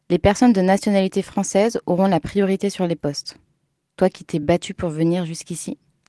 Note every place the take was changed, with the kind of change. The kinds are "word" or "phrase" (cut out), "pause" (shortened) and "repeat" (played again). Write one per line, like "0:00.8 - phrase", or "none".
none